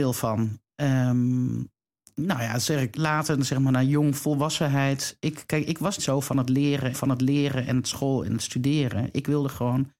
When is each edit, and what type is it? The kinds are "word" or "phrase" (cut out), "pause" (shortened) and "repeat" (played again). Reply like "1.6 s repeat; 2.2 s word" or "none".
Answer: 2.9 s word; 6.0 s word; 6.9 s repeat